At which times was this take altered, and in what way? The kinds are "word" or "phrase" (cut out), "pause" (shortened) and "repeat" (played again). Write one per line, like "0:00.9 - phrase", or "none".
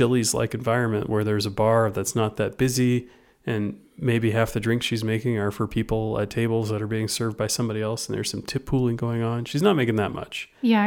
none